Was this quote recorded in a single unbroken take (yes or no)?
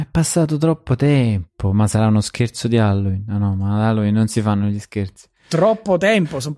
yes